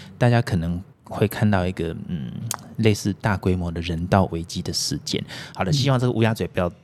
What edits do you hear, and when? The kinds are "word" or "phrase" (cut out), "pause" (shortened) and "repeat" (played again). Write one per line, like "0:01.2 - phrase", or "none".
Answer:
0:00.9 - pause